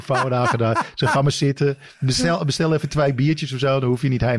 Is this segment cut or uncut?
uncut